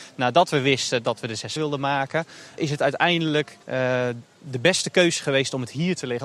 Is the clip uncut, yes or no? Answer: no